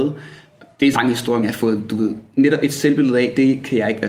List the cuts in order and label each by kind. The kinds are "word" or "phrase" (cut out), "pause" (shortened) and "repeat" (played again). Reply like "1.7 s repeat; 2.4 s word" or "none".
0.9 s phrase; 1.4 s word